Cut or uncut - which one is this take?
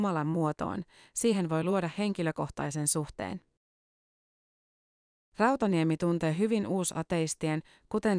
uncut